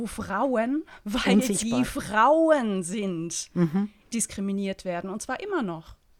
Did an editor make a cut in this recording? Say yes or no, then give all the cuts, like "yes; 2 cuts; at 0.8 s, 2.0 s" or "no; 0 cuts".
no; 0 cuts